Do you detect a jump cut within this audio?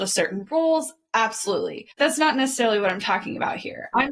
yes; 1 cut; at 1.9 s

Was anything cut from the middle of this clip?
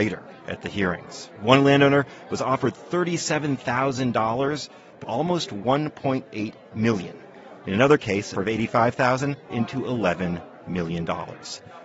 yes; 3 cuts; at 5.0 s, 8.3 s, 9.5 s

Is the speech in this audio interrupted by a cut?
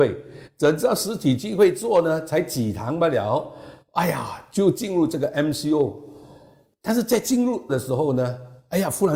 yes; 1 cut; at 7.7 s

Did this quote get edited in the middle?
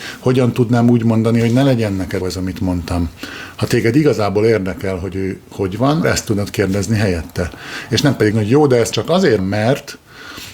yes; 5 cuts; at 2.2 s, 6.0 s, 8.3 s, 8.9 s, 9.4 s

